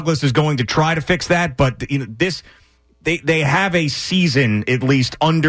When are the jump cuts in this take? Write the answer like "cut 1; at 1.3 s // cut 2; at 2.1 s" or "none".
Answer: none